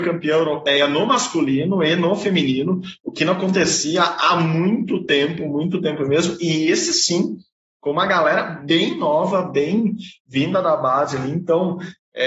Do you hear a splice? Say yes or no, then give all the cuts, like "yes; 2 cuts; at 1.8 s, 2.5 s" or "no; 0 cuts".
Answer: no; 0 cuts